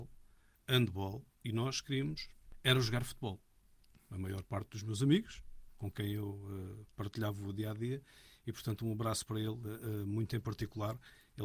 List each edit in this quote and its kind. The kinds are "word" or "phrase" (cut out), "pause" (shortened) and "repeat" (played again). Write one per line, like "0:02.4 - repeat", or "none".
none

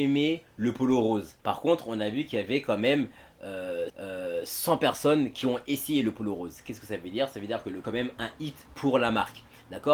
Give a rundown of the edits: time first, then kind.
0:01.4 - pause
0:03.9 - repeat
0:07.8 - phrase
0:08.7 - pause

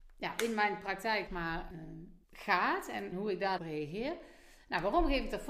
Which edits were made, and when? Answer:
0:01.3 - word
0:01.7 - word
0:02.2 - pause
0:03.1 - word
0:03.6 - phrase

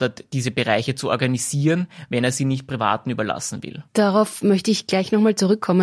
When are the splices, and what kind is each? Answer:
0:03.9 - pause

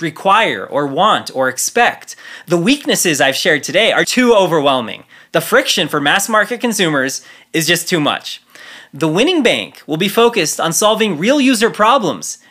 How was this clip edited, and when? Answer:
0:04.0 - word

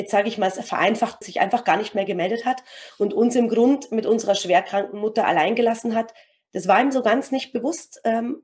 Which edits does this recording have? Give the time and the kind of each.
0:01.2 - phrase

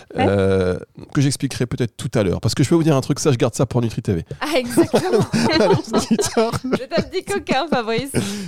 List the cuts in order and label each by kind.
none

